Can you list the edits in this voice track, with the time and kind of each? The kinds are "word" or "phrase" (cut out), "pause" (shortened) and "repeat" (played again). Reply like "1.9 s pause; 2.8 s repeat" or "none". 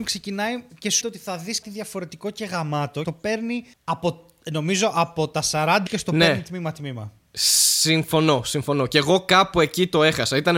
1.0 s word; 1.6 s word; 3.0 s phrase; 3.7 s pause; 5.9 s phrase